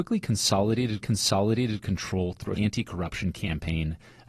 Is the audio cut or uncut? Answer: cut